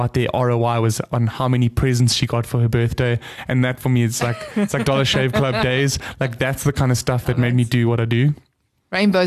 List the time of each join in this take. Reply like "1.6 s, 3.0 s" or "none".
none

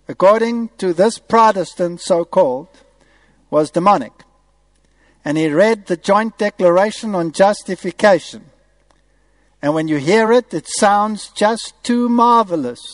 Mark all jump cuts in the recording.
none

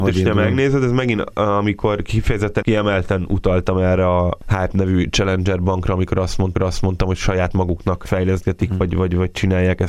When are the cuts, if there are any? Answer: 6.6 s

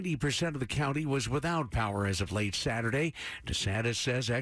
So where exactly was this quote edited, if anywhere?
none

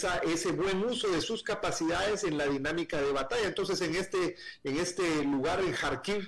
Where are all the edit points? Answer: none

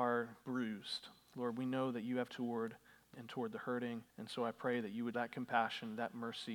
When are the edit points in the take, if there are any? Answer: 2.3 s, 3.1 s, 4.1 s, 5.1 s

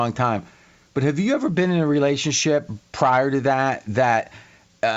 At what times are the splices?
none

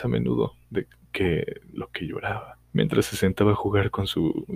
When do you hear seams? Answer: 2.6 s

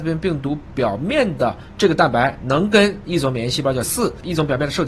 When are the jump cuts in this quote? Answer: 3.8 s

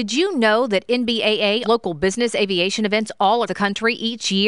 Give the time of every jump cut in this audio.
1.6 s, 3.5 s

